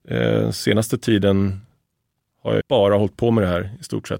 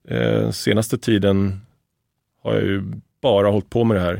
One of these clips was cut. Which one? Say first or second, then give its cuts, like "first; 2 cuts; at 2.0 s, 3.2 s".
first; 1 cut; at 2.6 s